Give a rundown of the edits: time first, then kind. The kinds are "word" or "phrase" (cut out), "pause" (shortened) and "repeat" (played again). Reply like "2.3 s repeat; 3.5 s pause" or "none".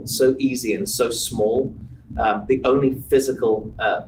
none

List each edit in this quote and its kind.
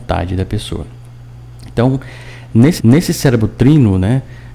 2.8 s repeat

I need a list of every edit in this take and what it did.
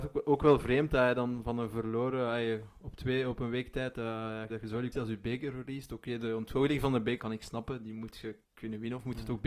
4.5 s word; 4.9 s word; 7.2 s word; 8.4 s pause

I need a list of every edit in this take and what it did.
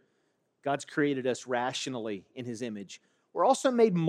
none

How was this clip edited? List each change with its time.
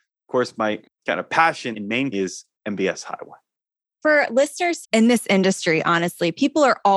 1.7 s word; 2.1 s word; 4.8 s word

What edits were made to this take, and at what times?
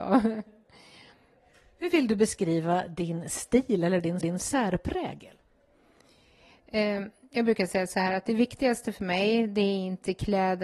4.2 s repeat

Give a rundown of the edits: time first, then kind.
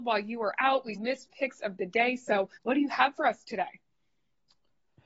1.0 s word; 1.3 s word; 2.6 s pause

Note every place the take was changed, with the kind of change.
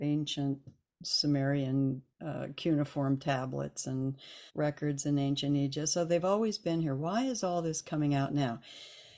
2.1 s pause; 4.5 s pause

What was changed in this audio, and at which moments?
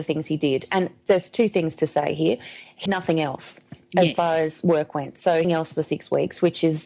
2.9 s word; 5.4 s phrase

